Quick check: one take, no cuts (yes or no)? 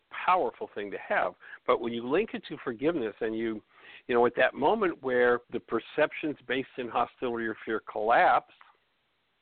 no